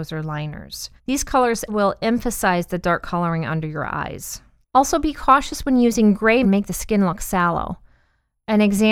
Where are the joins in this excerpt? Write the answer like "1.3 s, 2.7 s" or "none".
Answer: 1.0 s, 1.7 s, 4.6 s, 6.4 s